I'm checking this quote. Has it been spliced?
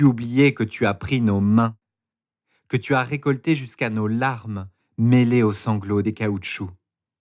no; 0 cuts

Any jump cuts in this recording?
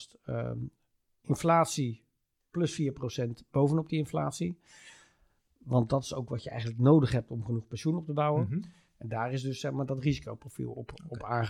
no; 0 cuts

